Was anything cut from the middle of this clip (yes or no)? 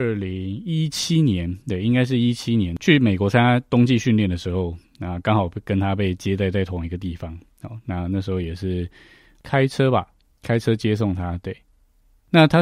no